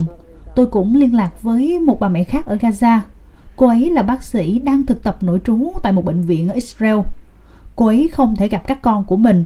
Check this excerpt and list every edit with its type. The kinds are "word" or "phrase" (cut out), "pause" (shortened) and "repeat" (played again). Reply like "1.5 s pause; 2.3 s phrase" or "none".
none